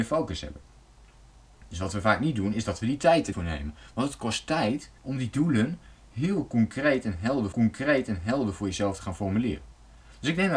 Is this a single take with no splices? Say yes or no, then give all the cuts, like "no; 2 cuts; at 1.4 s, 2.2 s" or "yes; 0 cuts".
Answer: no; 3 cuts; at 3.3 s, 5.0 s, 7.5 s